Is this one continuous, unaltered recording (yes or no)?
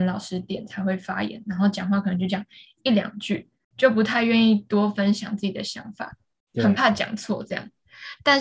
yes